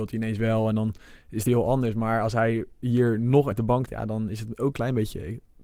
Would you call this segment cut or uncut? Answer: cut